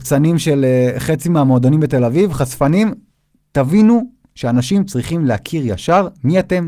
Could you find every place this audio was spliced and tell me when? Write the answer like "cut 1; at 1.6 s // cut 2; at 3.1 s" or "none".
none